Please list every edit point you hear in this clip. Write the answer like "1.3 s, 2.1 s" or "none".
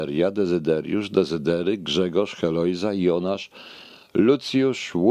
none